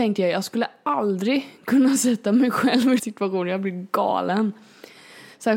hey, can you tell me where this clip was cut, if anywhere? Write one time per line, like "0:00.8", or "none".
0:03.0